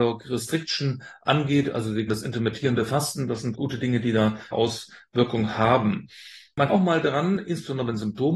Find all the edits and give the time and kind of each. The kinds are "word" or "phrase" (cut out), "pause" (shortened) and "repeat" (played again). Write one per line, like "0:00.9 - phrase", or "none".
0:02.1 - word
0:03.5 - word
0:04.5 - word
0:06.7 - word